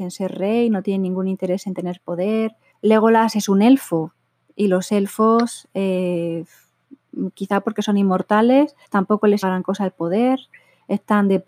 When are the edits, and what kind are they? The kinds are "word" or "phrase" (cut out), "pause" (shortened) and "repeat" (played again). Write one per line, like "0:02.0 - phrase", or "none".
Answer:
0:02.7 - pause
0:08.8 - pause
0:09.4 - word